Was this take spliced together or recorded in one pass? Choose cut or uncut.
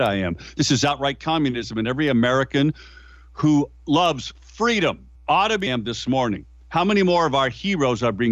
cut